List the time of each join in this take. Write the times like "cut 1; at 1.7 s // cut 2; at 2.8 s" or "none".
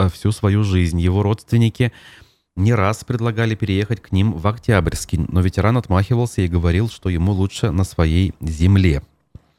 none